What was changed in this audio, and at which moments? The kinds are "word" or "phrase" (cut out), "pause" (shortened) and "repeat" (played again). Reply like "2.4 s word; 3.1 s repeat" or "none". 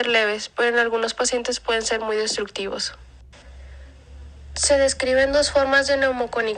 none